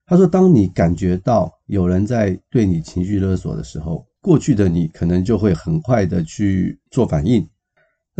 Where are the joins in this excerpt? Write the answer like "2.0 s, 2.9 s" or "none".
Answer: 4.2 s, 6.9 s